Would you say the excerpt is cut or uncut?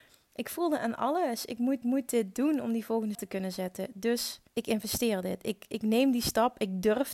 cut